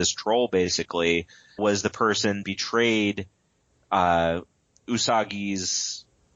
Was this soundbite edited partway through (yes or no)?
yes